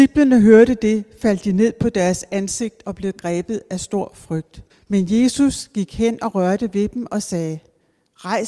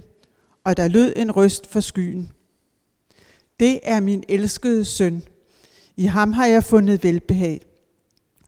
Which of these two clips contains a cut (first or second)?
first